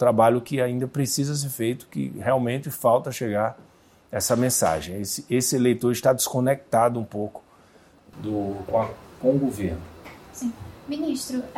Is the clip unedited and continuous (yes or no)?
yes